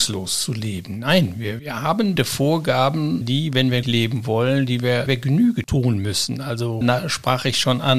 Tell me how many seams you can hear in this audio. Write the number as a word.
six